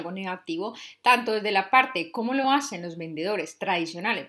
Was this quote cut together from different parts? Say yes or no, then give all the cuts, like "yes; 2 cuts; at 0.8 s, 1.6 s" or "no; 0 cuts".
no; 0 cuts